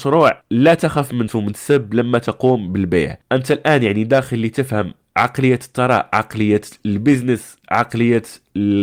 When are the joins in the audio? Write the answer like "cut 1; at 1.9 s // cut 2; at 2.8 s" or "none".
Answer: cut 1; at 1.3 s